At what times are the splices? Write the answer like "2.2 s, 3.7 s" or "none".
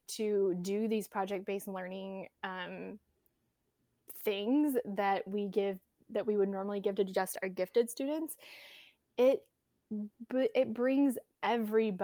none